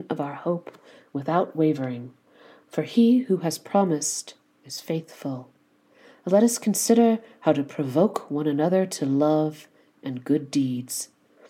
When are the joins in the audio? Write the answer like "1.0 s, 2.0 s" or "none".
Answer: none